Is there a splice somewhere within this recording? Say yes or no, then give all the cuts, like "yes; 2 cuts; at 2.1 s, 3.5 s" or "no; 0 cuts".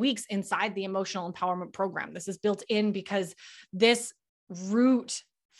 no; 0 cuts